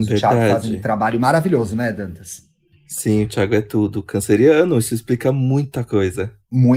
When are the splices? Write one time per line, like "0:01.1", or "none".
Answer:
0:02.7